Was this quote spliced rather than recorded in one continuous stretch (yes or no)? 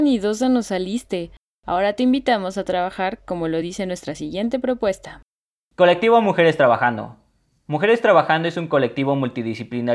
no